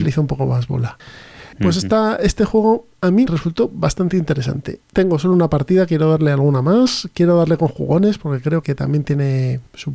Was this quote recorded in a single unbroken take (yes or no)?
no